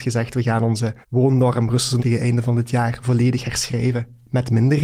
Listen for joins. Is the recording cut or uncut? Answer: cut